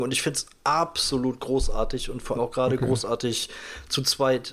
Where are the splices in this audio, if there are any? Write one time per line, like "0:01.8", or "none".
0:02.4